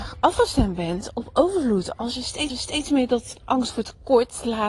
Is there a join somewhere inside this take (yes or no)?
yes